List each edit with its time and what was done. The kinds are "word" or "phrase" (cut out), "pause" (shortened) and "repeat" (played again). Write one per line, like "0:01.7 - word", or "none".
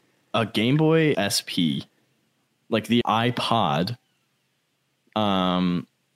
0:01.1 - word
0:03.0 - word